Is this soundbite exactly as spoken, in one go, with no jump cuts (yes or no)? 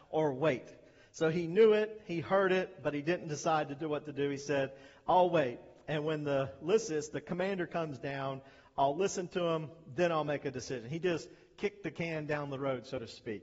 yes